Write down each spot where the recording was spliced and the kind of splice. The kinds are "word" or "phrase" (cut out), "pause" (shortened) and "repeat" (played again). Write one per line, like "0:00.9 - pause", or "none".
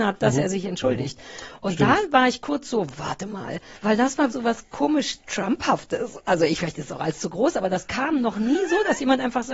0:03.8 - pause
0:04.3 - word